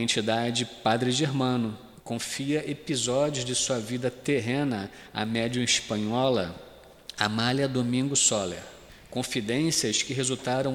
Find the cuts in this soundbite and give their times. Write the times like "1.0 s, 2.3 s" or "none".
2.0 s, 8.9 s